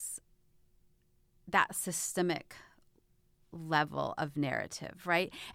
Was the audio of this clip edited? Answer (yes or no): no